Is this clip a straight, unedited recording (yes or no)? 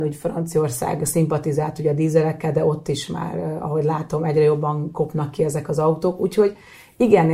yes